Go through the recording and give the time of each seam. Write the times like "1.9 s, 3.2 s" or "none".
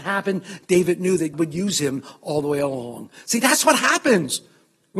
1.3 s